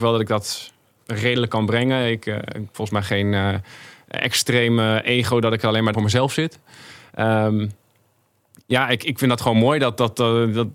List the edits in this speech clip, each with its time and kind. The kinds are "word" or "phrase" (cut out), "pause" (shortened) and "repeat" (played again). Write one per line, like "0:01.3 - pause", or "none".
0:01.0 - word
0:02.7 - phrase
0:05.9 - word